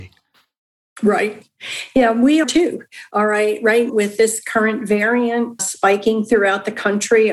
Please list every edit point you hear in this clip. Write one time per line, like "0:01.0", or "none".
0:02.4
0:03.9
0:05.6